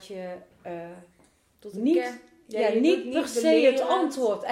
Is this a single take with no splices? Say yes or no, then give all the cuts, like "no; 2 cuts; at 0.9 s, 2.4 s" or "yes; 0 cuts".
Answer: yes; 0 cuts